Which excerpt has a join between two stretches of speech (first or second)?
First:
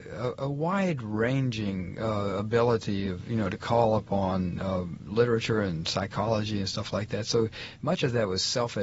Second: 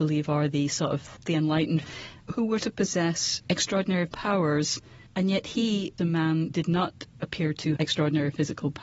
second